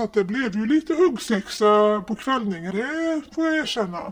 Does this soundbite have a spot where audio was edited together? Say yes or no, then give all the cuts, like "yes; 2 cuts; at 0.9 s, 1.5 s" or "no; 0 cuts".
yes; 1 cut; at 2.7 s